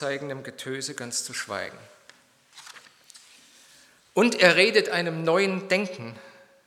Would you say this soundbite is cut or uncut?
uncut